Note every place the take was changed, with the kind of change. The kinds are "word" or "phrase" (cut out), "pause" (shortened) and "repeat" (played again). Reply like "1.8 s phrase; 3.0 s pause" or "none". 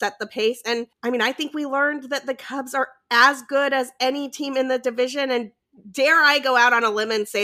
0.9 s pause